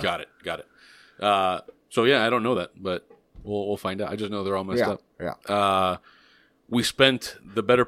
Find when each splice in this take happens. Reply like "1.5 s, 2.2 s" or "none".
none